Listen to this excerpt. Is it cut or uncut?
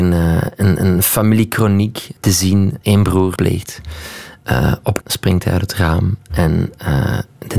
cut